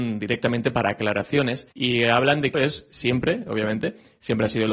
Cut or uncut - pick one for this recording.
cut